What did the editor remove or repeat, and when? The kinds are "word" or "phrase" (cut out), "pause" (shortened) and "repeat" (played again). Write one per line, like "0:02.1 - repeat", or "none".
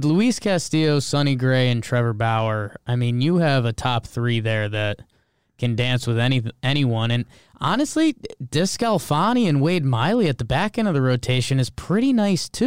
none